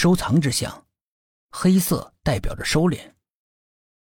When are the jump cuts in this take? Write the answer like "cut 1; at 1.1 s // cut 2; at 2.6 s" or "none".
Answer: none